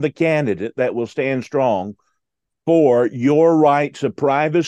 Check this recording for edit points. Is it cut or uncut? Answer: uncut